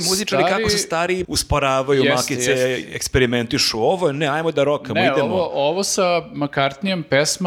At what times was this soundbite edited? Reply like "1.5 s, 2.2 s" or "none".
1.2 s